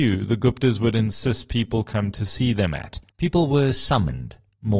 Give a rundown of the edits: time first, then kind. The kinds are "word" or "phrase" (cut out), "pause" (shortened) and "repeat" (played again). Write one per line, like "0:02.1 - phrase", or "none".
0:03.1 - pause